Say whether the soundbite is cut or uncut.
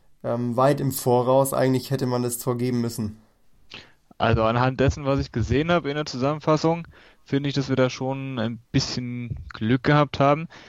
uncut